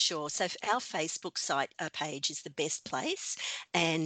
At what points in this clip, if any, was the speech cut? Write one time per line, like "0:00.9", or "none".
0:01.7